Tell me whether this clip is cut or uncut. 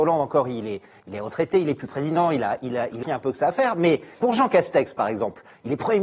cut